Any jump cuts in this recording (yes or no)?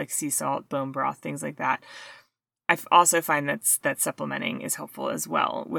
no